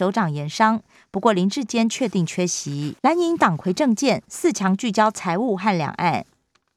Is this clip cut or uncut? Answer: cut